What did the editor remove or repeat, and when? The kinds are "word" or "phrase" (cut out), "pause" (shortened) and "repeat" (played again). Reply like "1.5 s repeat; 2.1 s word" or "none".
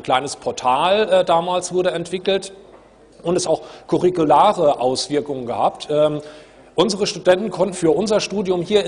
3.4 s phrase; 7.7 s word